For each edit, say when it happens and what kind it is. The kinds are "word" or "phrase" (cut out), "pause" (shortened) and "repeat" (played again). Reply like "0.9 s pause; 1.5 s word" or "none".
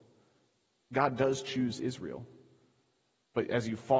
none